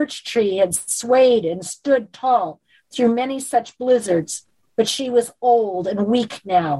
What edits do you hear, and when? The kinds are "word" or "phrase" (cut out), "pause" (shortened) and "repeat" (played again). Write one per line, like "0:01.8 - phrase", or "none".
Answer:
none